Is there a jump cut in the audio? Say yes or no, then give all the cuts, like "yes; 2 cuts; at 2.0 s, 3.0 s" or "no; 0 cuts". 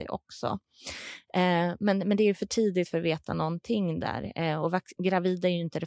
no; 0 cuts